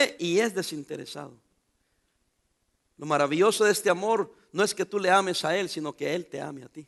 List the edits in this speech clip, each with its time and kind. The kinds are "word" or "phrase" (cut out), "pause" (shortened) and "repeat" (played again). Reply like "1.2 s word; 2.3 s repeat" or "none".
none